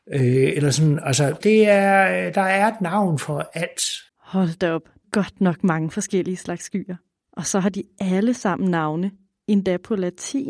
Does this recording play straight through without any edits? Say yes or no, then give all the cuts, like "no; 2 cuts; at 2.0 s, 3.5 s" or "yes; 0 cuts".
no; 3 cuts; at 1.4 s, 4.1 s, 5.0 s